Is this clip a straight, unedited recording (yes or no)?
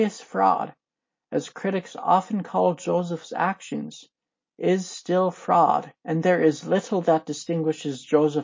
yes